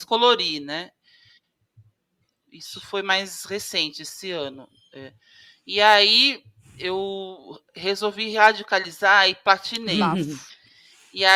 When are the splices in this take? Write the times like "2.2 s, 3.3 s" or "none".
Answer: none